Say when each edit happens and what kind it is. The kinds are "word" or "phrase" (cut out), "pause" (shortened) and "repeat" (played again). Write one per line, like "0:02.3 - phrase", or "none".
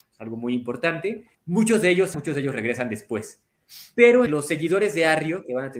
0:01.3 - pause
0:02.1 - word
0:04.3 - word